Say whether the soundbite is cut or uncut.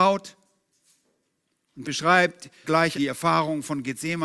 cut